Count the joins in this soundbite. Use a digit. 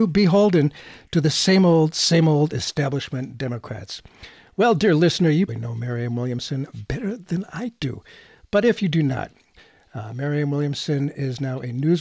1